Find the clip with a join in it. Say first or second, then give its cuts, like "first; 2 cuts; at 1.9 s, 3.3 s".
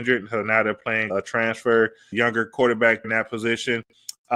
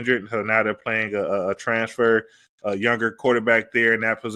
first; 3 cuts; at 1.1 s, 2.1 s, 3.0 s